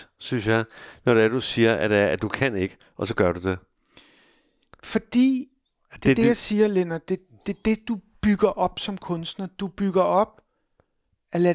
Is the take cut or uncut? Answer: uncut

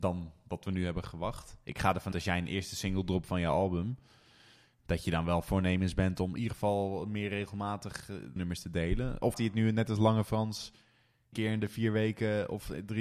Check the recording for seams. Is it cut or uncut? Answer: cut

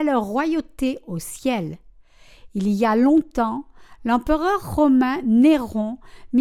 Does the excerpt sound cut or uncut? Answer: uncut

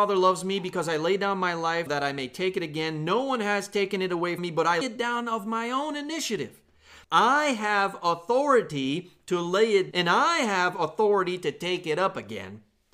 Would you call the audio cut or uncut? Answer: cut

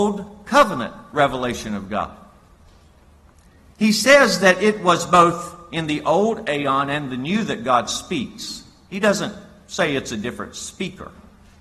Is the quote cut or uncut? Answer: uncut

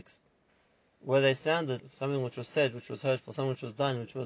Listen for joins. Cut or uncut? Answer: cut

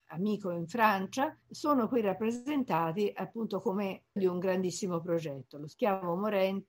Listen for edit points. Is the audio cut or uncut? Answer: cut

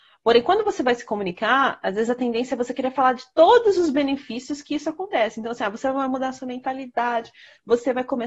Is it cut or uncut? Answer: uncut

